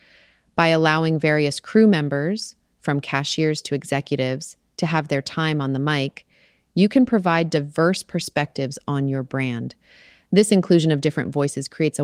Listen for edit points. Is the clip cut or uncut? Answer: uncut